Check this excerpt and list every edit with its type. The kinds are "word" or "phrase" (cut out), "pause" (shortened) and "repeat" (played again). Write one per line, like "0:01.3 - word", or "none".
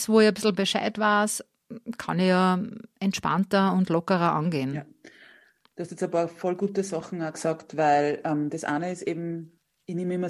none